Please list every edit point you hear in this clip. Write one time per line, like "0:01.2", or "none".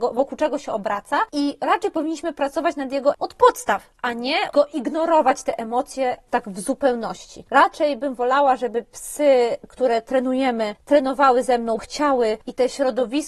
0:03.1
0:04.5
0:11.8